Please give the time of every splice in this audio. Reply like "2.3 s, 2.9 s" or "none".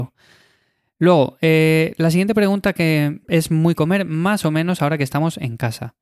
3.7 s

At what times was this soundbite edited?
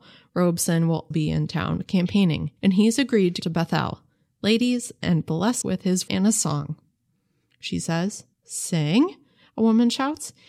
1.1 s, 2.6 s, 3.4 s, 5.6 s, 6.1 s, 8.3 s

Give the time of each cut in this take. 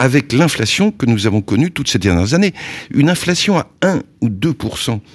none

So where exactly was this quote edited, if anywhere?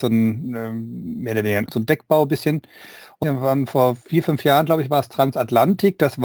1.7 s, 3.2 s, 4.0 s

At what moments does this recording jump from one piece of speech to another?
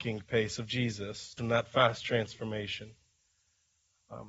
1.4 s

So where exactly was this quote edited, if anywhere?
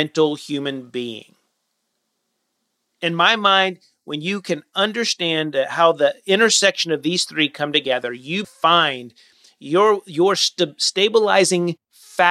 8.4 s

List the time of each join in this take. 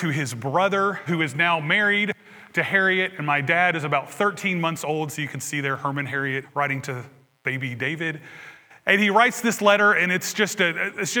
1.1 s, 6.4 s

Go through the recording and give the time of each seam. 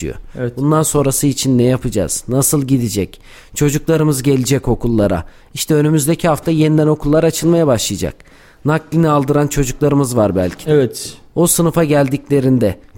none

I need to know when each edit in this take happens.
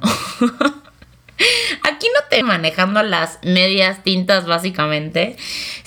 2.4 s

